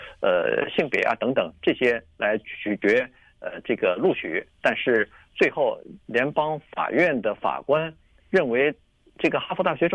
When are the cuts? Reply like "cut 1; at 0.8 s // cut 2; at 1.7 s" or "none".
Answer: none